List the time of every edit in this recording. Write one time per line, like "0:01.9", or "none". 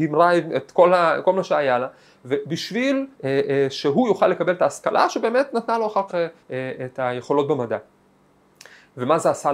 0:03.1
0:06.1
0:06.4